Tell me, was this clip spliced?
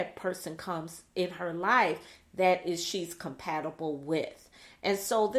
no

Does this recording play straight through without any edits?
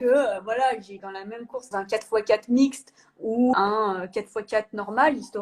no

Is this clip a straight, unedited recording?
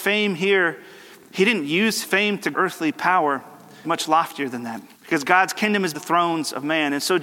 no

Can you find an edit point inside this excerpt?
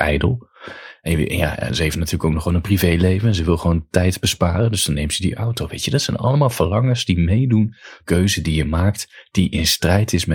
yes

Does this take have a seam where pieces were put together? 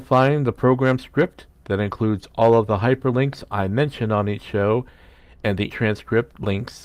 yes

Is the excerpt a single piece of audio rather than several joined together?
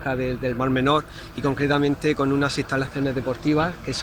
yes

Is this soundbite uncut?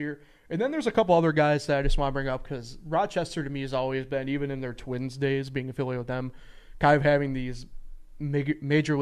yes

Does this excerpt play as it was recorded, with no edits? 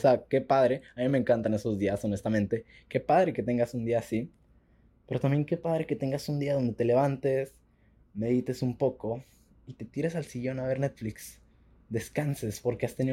yes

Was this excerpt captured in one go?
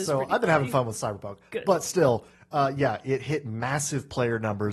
yes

